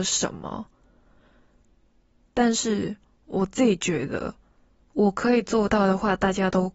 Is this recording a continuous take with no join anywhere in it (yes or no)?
yes